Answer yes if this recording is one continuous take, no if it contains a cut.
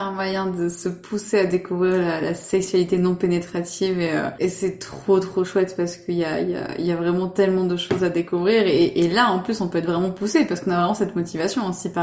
yes